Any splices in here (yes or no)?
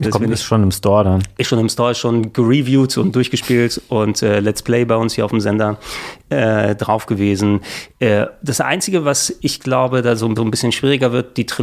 yes